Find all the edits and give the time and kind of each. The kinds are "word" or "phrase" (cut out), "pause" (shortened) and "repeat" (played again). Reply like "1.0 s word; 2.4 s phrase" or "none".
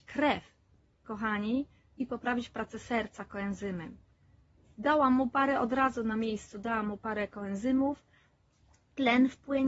none